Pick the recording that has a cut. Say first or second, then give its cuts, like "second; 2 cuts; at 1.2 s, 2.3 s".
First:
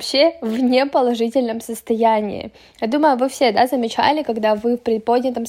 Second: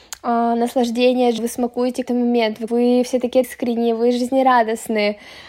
second; 4 cuts; at 1.4 s, 2.1 s, 2.7 s, 3.4 s